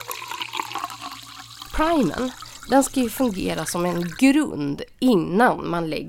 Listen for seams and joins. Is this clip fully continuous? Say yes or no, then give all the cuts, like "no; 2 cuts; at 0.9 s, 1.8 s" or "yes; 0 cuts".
yes; 0 cuts